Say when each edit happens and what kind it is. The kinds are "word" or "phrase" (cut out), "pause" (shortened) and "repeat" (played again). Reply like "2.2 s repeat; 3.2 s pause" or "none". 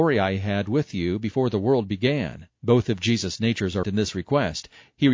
2.6 s pause; 3.8 s word